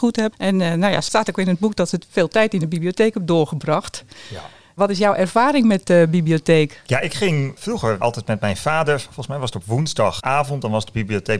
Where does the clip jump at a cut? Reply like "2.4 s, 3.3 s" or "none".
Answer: none